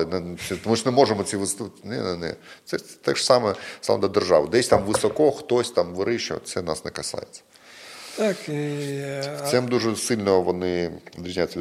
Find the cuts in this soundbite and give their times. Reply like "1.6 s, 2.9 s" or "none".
none